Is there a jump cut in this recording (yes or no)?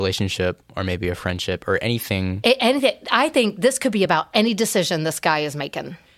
no